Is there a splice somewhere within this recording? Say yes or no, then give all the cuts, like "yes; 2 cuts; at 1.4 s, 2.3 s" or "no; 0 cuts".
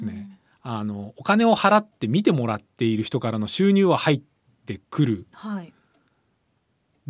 no; 0 cuts